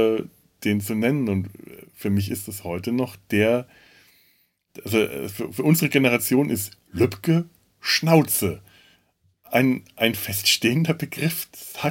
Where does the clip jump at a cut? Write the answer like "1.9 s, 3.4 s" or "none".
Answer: none